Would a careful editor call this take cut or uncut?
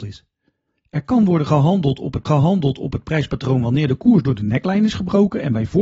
cut